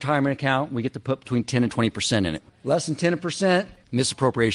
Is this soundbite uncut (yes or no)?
yes